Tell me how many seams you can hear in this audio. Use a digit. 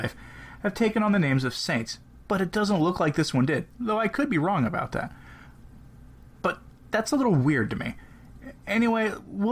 0